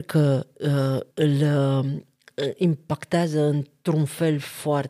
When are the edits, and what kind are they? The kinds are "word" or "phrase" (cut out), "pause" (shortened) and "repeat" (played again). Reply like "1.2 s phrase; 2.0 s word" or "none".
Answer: 1.1 s word